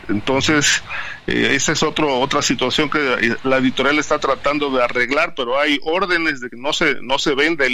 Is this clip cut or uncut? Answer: uncut